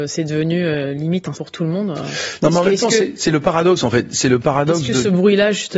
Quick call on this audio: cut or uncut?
cut